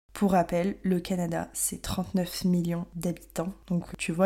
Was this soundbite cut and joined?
no; 0 cuts

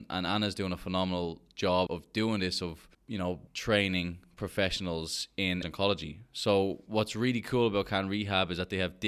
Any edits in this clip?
yes; 4 cuts; at 1.9 s, 2.9 s, 3.5 s, 5.6 s

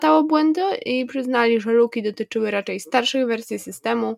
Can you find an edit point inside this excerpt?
no; 0 cuts

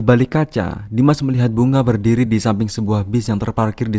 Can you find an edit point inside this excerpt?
no; 0 cuts

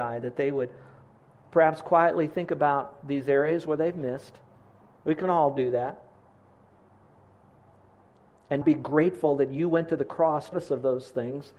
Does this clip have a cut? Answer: yes; 2 cuts; at 8.6 s, 10.5 s

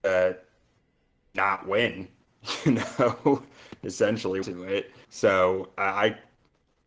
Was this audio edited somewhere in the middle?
yes; 2 cuts; at 4.4 s, 5.0 s

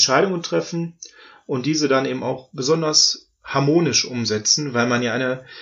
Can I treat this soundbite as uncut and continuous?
yes; 0 cuts

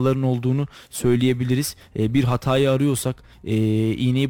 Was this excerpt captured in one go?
yes; 0 cuts

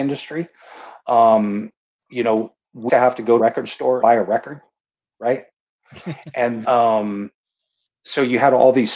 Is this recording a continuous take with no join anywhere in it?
no; 5 cuts; at 2.1 s, 2.9 s, 3.4 s, 4.0 s, 6.6 s

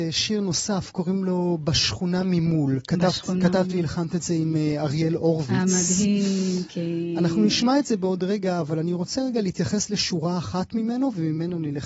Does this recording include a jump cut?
no; 0 cuts

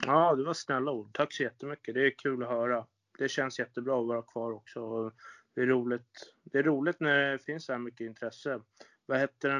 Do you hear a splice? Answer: no; 0 cuts

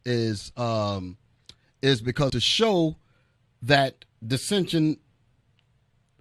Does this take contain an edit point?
yes; 1 cut; at 2.3 s

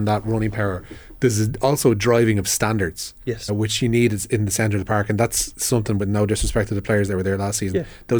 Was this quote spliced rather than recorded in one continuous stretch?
yes; 1 cut; at 3.5 s

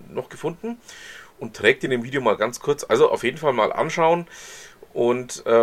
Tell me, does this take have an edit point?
no; 0 cuts

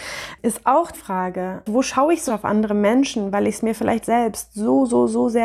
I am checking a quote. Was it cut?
yes; 3 cuts; at 0.9 s, 2.3 s, 4.0 s

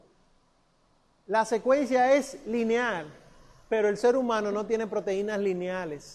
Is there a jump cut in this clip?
no; 0 cuts

